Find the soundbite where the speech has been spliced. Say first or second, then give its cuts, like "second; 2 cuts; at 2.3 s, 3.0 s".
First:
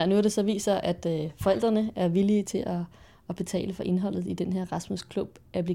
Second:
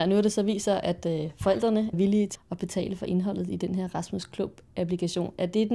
second; 2 cuts; at 1.9 s, 2.4 s